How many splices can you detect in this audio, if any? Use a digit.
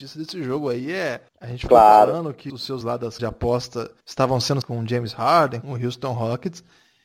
7